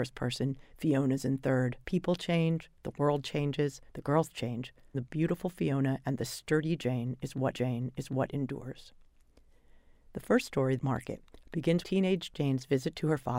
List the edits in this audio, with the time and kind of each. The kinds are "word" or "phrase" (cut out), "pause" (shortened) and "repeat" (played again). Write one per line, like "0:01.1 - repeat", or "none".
0:01.8 - pause
0:03.9 - pause
0:04.3 - word
0:04.9 - phrase
0:07.5 - repeat
0:10.8 - word
0:11.8 - word